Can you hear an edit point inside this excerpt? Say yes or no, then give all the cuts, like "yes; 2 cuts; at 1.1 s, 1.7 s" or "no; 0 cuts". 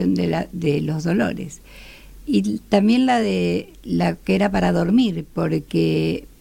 no; 0 cuts